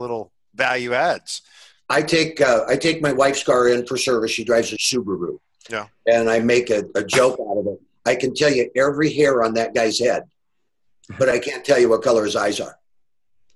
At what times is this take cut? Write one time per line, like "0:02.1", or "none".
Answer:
none